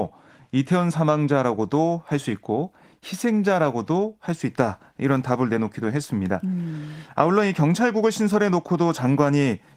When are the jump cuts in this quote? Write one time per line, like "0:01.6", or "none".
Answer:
none